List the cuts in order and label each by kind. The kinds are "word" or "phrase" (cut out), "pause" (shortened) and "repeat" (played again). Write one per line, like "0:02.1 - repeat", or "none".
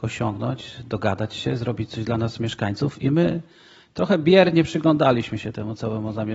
none